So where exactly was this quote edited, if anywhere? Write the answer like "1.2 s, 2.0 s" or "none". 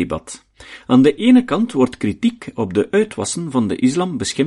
none